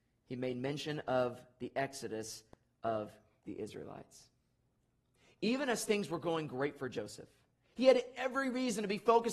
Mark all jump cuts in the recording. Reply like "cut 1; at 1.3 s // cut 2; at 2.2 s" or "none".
none